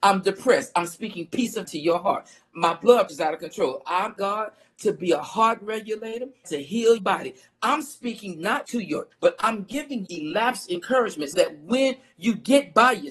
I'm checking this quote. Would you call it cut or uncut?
cut